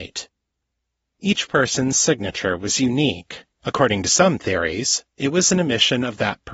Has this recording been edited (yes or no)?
yes